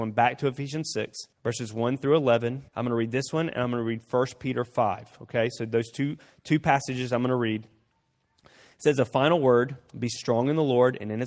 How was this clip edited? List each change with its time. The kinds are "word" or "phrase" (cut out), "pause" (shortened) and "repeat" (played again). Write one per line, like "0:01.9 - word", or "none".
0:01.3 - pause
0:02.7 - pause